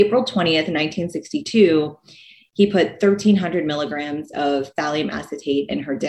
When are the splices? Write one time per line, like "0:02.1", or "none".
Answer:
none